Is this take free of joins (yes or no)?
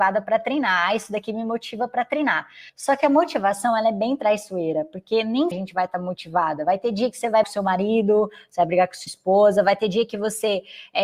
no